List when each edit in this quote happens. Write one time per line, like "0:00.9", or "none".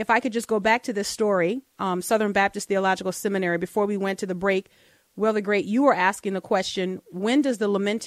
none